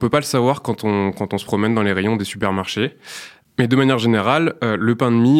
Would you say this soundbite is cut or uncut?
uncut